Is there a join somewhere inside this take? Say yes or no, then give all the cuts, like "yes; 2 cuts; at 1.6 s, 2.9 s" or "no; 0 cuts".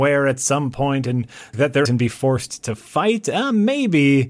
yes; 2 cuts; at 1.5 s, 1.9 s